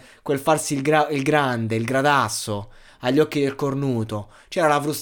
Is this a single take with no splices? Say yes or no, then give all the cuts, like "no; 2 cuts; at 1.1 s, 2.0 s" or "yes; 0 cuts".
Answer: yes; 0 cuts